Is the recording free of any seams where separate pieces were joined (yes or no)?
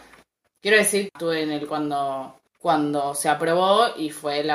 no